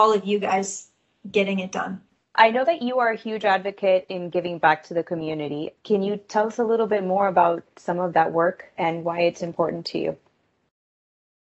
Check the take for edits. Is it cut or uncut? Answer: uncut